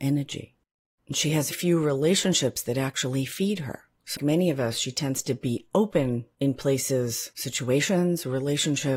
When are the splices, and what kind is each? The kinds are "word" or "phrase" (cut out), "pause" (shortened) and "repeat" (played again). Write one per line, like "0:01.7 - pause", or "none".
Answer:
0:01.5 - word
0:04.2 - word